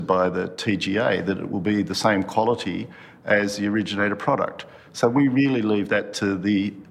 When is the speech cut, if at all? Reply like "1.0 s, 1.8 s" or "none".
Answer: none